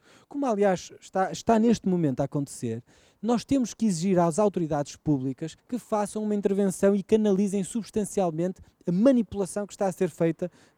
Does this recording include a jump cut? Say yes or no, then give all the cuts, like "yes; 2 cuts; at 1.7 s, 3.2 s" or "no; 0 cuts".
yes; 1 cut; at 5.6 s